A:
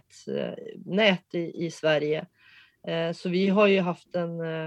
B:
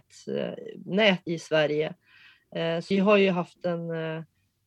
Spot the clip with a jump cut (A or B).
B